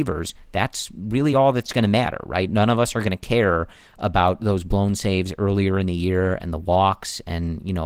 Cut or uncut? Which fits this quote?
uncut